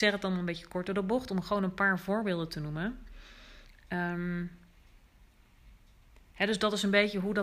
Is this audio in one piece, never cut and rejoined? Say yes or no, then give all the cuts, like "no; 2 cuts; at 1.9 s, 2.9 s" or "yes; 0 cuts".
yes; 0 cuts